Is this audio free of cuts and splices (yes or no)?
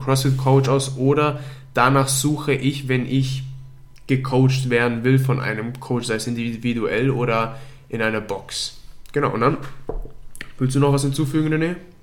yes